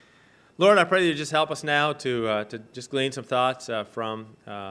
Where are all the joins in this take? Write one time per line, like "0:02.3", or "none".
none